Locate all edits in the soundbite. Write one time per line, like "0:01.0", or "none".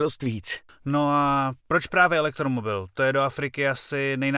0:01.6